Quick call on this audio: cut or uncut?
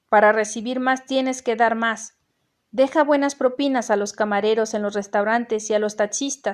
uncut